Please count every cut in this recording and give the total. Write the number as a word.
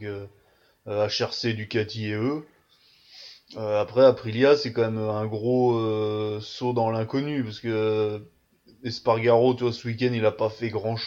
zero